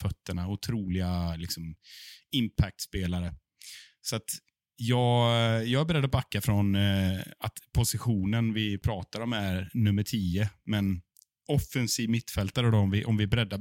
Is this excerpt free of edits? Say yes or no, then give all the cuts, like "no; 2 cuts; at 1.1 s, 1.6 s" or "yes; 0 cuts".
yes; 0 cuts